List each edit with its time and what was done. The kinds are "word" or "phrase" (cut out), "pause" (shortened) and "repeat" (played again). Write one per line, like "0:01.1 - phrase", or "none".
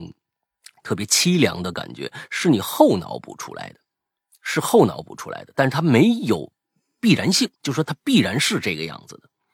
0:07.5 - pause